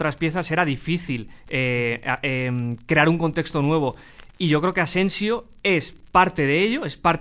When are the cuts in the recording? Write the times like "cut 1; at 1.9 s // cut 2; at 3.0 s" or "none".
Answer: none